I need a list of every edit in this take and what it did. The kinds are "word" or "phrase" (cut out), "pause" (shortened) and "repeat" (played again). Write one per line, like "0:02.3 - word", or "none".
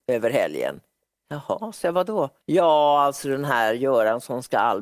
0:01.0 - pause
0:02.4 - pause